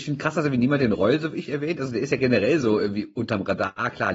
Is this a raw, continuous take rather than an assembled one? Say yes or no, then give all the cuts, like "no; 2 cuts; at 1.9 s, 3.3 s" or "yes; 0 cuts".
yes; 0 cuts